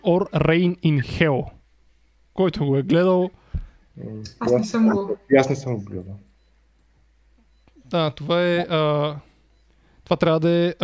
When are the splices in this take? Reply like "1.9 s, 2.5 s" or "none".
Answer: none